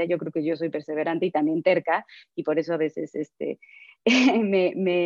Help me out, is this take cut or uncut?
uncut